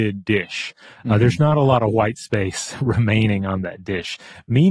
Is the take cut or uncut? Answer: uncut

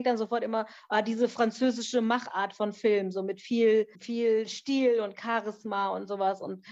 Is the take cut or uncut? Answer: cut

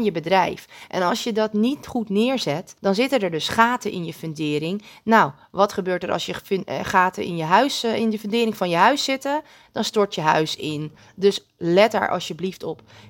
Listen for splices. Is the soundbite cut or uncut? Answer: cut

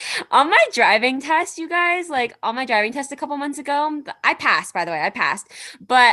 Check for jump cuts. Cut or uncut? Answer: uncut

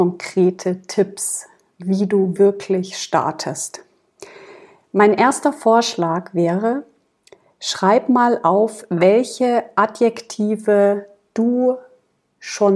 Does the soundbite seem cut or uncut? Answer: uncut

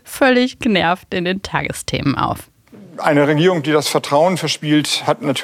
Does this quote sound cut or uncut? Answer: uncut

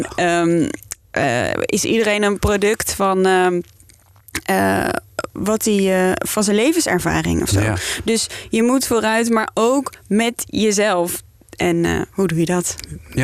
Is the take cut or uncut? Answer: cut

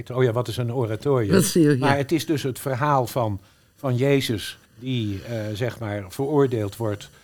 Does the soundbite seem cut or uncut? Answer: cut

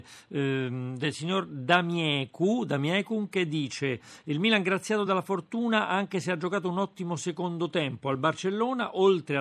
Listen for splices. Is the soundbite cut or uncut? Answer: uncut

